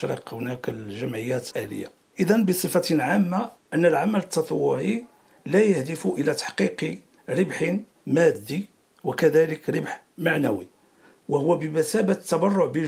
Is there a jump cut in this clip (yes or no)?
yes